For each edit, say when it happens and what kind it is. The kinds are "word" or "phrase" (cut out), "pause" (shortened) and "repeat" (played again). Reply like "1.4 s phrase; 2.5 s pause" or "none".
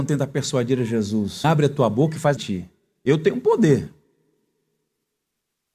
1.4 s word; 2.4 s phrase